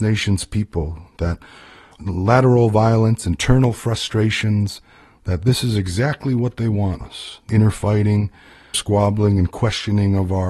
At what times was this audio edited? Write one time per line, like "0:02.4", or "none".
0:07.0
0:07.5
0:08.7